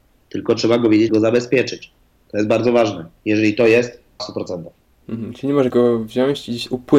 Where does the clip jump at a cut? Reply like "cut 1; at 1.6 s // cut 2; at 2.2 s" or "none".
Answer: cut 1; at 1.1 s // cut 2; at 4.2 s // cut 3; at 4.8 s // cut 4; at 5.7 s